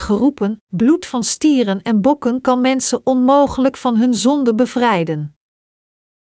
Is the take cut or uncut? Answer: uncut